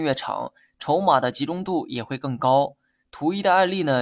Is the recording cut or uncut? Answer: uncut